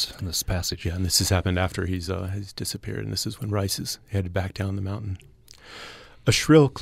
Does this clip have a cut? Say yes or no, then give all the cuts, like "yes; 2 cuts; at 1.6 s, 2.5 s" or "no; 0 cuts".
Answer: no; 0 cuts